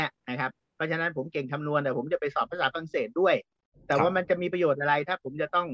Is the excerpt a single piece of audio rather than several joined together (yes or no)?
yes